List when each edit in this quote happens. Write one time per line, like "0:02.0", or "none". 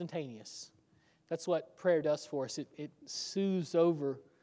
none